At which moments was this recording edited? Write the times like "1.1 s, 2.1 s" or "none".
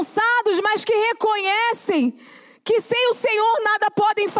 none